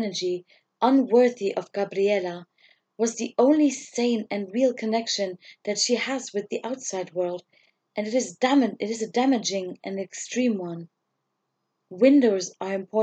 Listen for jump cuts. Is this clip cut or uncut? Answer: uncut